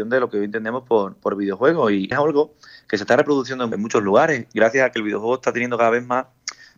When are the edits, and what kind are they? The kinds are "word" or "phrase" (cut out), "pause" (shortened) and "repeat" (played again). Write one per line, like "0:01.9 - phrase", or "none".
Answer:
0:02.1 - word
0:03.7 - word

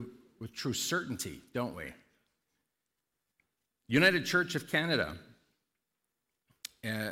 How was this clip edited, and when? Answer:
none

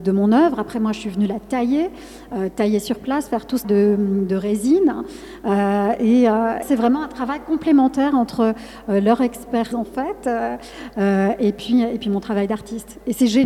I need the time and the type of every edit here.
0:03.6 - word
0:06.6 - word
0:09.7 - word

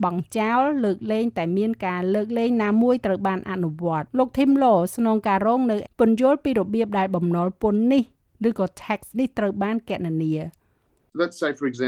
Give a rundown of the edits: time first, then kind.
0:04.1 - pause
0:05.8 - word
0:09.1 - word

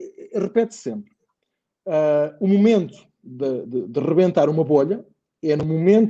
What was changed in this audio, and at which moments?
none

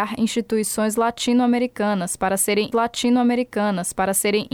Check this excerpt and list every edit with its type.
0:02.7 - repeat

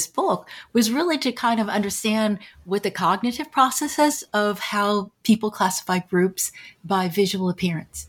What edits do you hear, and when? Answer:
none

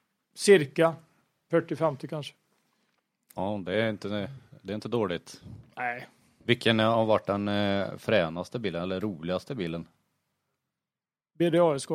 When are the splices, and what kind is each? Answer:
none

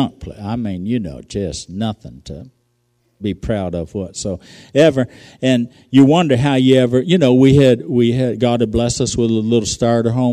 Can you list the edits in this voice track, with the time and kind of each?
none

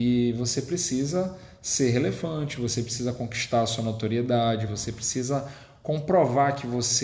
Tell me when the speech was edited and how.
none

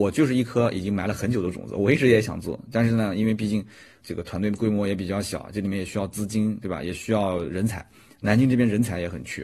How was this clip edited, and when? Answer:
0:04.0 - word

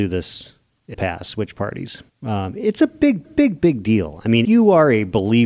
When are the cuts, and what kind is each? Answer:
0:00.9 - word
0:02.1 - pause
0:03.2 - repeat
0:04.4 - word

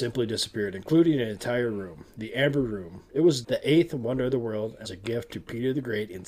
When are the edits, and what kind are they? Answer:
0:03.4 - word
0:04.8 - word

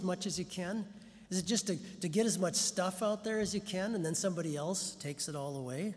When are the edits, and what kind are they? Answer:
none

